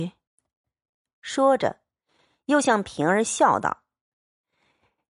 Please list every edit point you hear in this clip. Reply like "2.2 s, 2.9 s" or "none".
none